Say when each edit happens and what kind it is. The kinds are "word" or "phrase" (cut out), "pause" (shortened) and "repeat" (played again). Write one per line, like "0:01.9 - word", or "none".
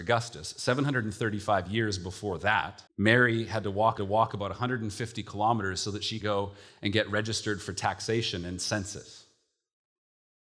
0:02.9 - pause
0:04.0 - repeat
0:06.2 - word